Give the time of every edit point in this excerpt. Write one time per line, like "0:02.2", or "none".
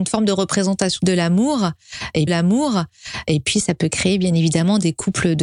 0:01.0
0:02.3